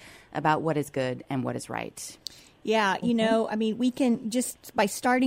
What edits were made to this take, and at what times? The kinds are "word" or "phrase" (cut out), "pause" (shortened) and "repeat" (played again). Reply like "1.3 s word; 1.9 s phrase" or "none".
none

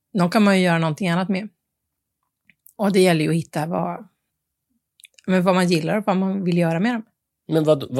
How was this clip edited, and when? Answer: none

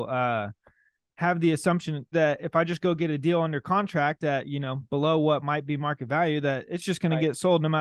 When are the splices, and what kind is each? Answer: 2.1 s word

